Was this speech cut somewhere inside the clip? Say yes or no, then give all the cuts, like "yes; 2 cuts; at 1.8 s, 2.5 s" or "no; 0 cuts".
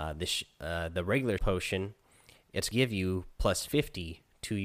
yes; 2 cuts; at 1.4 s, 2.7 s